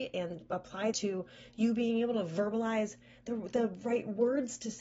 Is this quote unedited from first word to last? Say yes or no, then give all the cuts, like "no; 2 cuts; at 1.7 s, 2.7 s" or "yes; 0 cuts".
no; 1 cut; at 0.9 s